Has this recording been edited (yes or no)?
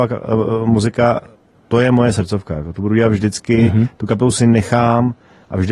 no